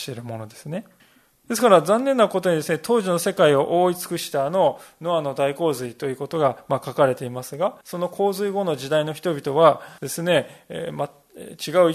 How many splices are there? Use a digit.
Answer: 3